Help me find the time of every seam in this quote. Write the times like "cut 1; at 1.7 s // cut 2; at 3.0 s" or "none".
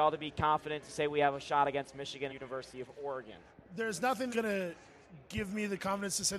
cut 1; at 2.3 s // cut 2; at 4.3 s